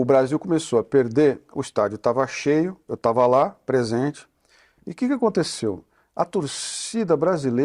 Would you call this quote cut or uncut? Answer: uncut